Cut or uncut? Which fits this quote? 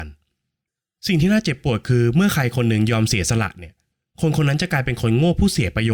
uncut